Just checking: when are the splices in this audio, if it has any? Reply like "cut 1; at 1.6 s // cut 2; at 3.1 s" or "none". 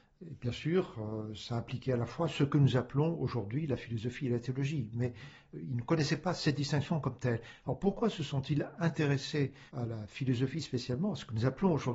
cut 1; at 9.7 s